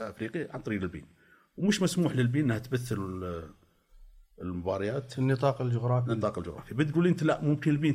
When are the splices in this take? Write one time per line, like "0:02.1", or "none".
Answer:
none

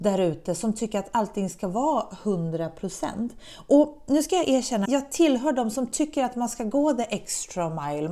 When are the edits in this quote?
0:04.8

